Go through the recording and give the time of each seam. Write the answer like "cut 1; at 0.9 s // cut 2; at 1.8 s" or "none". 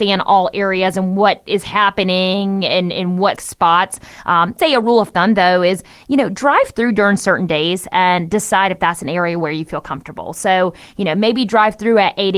cut 1; at 3.4 s // cut 2; at 4.6 s